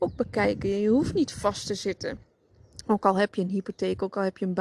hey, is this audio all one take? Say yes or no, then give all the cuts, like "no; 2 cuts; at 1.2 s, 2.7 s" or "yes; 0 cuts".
yes; 0 cuts